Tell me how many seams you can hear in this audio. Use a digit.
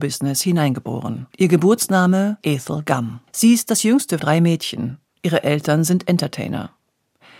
4